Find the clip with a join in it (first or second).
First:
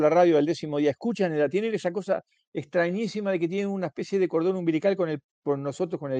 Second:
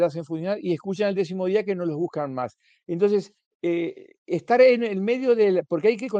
second